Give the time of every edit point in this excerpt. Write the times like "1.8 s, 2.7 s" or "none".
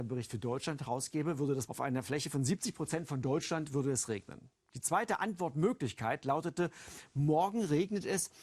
1.7 s